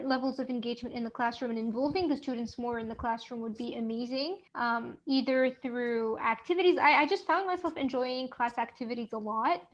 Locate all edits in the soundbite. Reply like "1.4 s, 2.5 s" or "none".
4.5 s

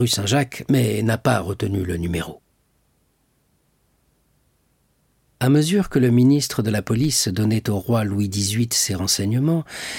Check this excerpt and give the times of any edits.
none

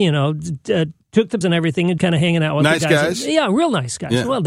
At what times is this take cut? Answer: 1.0 s, 1.4 s, 2.0 s

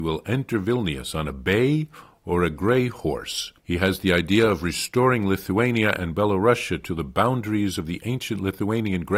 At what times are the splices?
3.6 s

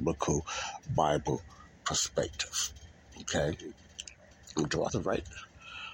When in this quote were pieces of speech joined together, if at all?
4.9 s

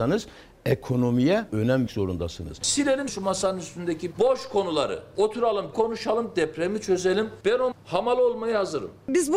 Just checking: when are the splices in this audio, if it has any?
1.5 s, 1.9 s, 3.1 s, 4.1 s, 5.7 s, 7.7 s

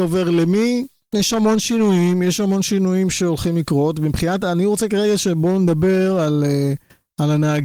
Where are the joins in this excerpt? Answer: none

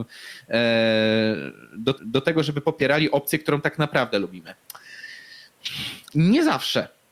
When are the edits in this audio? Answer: 2.0 s, 6.1 s

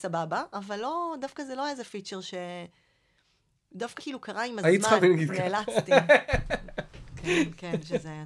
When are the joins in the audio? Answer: 4.0 s, 5.0 s

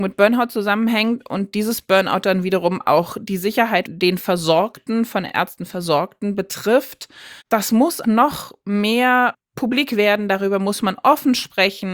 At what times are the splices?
3.8 s, 5.3 s, 7.4 s, 8.0 s

